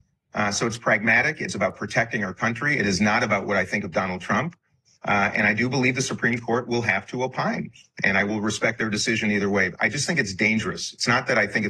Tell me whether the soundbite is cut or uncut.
uncut